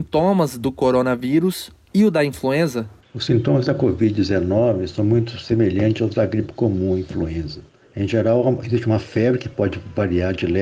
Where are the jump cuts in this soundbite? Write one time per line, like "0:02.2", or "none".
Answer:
none